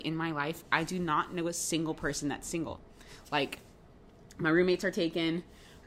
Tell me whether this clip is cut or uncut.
uncut